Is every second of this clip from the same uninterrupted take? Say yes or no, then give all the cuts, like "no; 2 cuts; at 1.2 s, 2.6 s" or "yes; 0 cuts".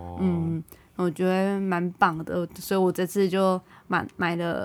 no; 1 cut; at 3.7 s